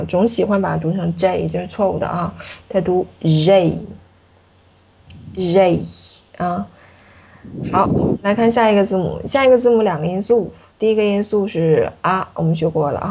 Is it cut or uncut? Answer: uncut